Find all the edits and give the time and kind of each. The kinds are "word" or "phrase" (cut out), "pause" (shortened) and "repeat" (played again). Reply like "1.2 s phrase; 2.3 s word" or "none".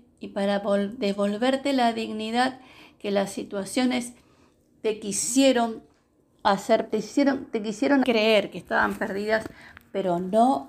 6.9 s word; 8.0 s word